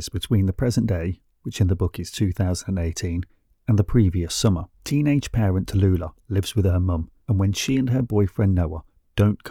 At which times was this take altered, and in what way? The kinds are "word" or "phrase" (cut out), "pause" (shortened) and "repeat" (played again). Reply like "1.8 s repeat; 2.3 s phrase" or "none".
4.7 s pause; 7.2 s pause